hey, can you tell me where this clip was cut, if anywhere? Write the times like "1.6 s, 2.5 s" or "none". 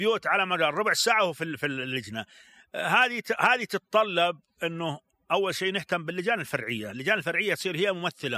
none